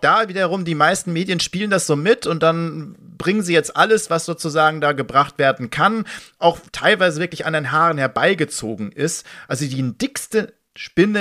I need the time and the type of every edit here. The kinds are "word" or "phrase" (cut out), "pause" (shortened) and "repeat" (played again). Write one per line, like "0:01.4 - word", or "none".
0:06.7 - pause